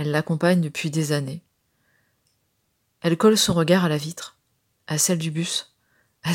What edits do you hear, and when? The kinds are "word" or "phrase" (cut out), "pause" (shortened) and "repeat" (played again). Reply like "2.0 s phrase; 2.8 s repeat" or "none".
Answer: none